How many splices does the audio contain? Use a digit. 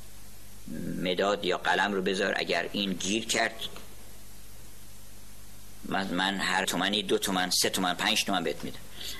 1